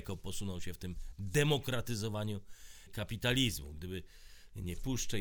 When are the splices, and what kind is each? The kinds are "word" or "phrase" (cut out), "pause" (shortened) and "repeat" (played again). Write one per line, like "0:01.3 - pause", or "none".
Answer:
0:02.9 - word